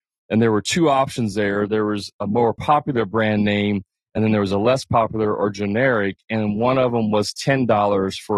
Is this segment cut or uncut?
uncut